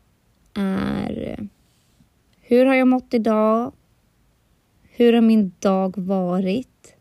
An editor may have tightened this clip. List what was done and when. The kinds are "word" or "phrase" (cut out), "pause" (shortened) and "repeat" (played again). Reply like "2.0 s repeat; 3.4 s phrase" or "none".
none